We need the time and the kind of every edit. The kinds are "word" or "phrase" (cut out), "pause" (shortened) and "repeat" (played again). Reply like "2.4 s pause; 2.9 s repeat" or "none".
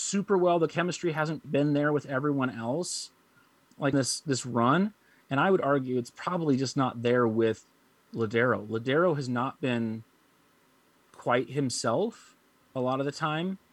1.4 s word; 3.9 s word; 12.6 s word